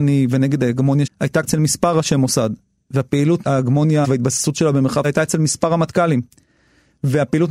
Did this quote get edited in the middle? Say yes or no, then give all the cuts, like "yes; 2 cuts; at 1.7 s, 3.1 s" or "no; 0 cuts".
yes; 5 cuts; at 1.1 s, 1.4 s, 3.4 s, 4.0 s, 5.0 s